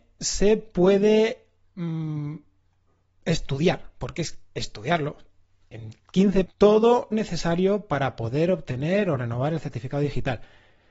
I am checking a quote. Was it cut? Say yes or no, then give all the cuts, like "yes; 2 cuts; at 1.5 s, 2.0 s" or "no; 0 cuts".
yes; 2 cuts; at 6.5 s, 7.1 s